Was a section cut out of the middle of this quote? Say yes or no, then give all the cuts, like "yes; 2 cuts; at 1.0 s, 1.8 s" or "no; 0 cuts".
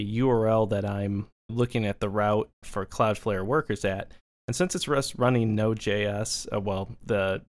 yes; 2 cuts; at 1.5 s, 2.6 s